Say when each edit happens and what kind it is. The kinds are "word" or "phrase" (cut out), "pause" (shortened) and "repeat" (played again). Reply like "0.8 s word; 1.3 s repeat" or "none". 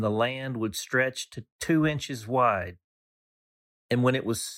none